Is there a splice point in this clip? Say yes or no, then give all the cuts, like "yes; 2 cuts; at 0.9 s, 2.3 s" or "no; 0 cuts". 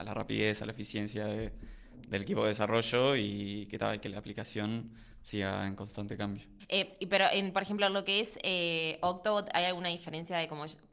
no; 0 cuts